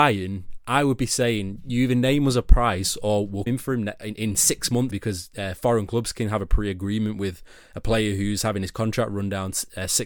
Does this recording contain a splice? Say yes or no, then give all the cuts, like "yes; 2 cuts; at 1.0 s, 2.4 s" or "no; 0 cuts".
yes; 2 cuts; at 3.5 s, 4.9 s